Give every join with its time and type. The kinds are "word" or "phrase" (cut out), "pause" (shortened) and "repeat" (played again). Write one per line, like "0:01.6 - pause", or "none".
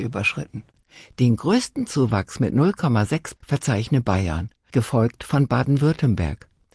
0:03.4 - word
0:04.7 - word